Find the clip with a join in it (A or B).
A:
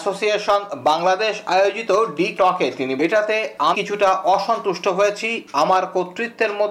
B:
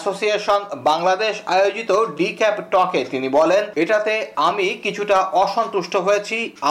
A